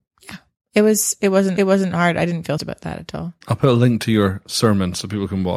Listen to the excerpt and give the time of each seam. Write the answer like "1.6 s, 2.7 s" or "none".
1.6 s, 2.6 s, 3.4 s